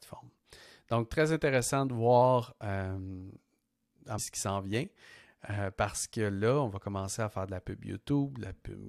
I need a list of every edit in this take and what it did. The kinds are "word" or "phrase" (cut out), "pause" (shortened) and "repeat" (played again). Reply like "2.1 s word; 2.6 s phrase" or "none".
4.2 s phrase